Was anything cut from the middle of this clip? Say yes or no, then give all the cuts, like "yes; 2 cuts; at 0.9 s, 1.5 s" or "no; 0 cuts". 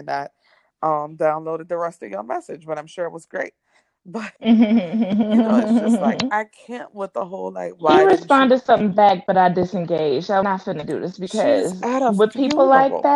yes; 2 cuts; at 4.4 s, 10.4 s